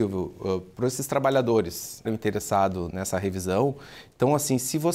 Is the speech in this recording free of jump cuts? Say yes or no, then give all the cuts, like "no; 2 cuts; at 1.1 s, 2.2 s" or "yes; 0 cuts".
no; 2 cuts; at 2.1 s, 2.9 s